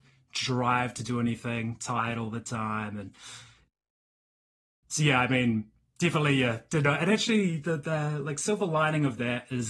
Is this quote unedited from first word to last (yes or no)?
yes